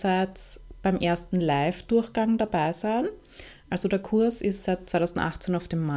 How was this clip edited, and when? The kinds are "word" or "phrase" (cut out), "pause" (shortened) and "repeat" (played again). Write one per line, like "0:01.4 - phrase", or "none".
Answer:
none